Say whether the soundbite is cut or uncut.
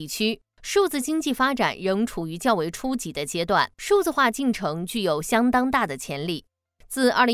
cut